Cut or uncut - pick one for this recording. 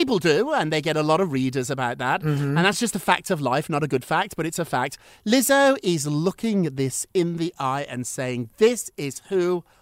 uncut